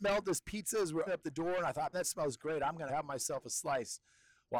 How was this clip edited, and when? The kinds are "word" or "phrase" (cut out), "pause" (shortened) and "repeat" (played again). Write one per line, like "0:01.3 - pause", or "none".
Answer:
0:01.1 - word
0:01.9 - word
0:02.9 - word